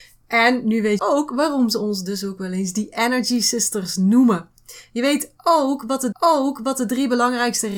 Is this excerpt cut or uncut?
cut